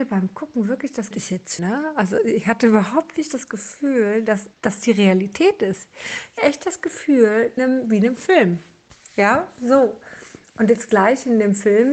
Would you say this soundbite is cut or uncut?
cut